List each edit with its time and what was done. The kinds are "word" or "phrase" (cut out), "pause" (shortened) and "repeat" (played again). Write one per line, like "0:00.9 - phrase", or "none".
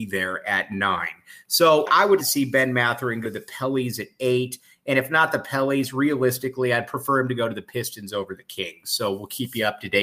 0:01.9 - word
0:02.2 - word
0:03.2 - word